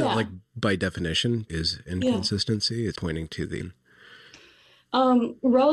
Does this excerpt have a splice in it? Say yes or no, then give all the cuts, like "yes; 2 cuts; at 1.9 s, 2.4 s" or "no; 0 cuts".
yes; 3 cuts; at 1.5 s, 2.9 s, 3.6 s